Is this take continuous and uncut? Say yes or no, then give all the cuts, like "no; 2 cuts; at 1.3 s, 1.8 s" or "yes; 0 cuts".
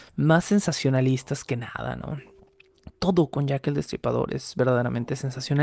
yes; 0 cuts